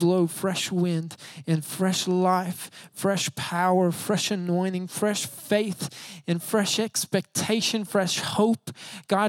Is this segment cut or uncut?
uncut